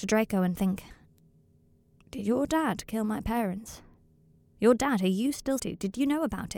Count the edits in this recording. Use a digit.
1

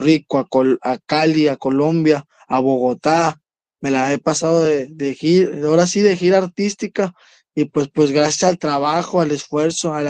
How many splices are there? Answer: 0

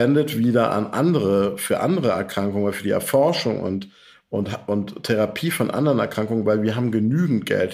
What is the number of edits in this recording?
0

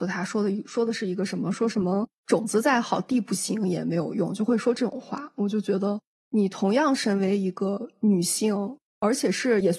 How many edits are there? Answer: 0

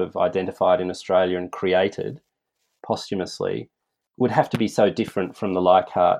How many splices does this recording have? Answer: 0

